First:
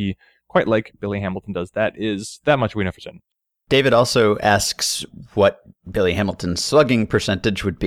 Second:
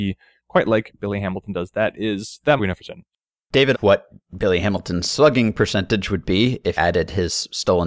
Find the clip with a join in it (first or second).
second